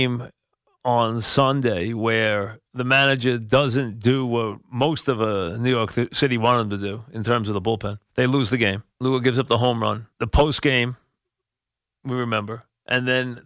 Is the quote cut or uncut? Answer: cut